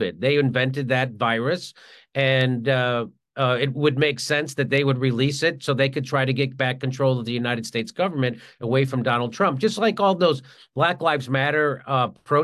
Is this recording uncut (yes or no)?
yes